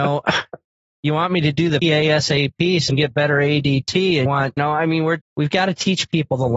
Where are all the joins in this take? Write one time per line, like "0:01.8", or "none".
0:01.8
0:02.9
0:04.3
0:04.6
0:05.2